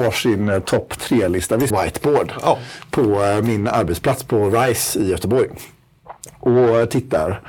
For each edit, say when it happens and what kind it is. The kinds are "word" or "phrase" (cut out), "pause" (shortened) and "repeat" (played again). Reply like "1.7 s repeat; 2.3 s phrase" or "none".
1.7 s phrase